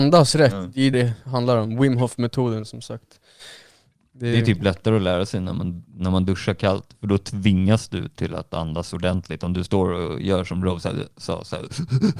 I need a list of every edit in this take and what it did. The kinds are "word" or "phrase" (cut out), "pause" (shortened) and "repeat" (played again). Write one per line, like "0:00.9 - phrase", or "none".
0:00.9 - word